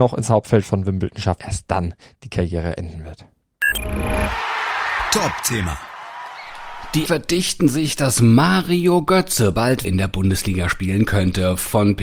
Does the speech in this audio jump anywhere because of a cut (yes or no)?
yes